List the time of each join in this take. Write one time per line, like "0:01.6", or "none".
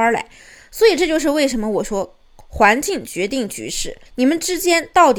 0:04.1